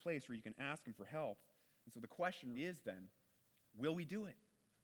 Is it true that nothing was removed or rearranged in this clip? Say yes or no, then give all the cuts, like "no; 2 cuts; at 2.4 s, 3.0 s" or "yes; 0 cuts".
no; 1 cut; at 2.5 s